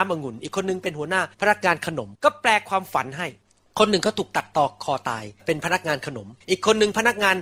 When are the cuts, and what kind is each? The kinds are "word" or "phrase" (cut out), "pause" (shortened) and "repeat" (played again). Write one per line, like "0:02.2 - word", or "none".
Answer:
0:01.3 - pause
0:02.1 - pause
0:05.4 - pause
0:06.4 - pause